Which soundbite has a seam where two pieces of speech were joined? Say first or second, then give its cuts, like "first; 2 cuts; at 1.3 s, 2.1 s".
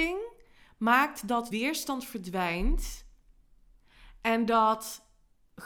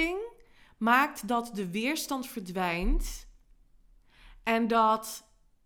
first; 1 cut; at 1.5 s